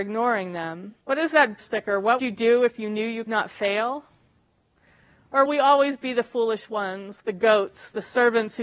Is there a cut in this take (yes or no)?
yes